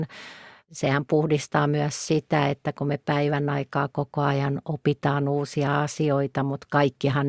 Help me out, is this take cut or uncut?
uncut